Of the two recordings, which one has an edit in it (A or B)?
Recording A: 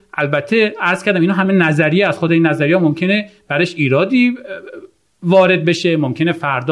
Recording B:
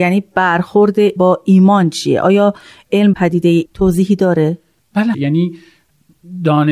B